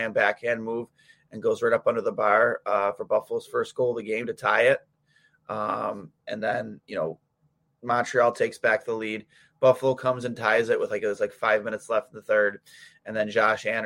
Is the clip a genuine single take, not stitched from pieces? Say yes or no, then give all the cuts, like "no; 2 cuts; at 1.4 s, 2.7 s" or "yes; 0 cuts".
yes; 0 cuts